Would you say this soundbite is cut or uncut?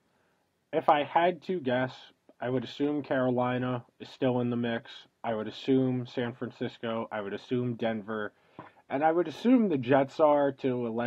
uncut